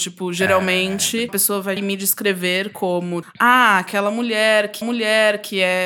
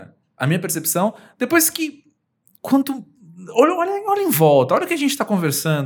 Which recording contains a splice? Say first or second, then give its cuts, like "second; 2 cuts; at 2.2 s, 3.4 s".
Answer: first; 4 cuts; at 1.3 s, 1.8 s, 3.2 s, 4.8 s